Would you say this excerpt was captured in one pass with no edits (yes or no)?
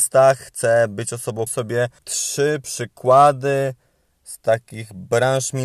no